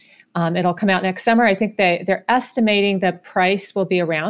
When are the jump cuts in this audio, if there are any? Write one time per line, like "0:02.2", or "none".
none